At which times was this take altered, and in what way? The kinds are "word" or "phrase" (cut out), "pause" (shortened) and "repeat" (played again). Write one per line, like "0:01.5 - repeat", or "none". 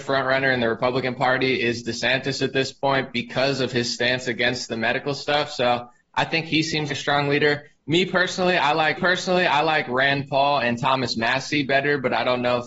0:06.9 - word
0:09.0 - repeat